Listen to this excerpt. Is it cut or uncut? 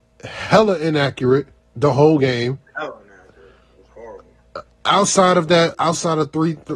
cut